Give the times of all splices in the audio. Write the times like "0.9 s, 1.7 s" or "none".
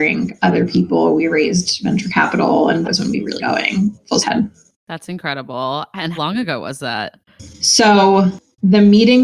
2.8 s, 3.4 s, 4.2 s, 6.1 s